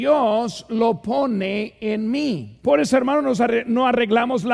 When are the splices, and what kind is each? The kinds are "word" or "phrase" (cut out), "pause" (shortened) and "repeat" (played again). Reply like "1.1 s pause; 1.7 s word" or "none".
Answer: 2.6 s pause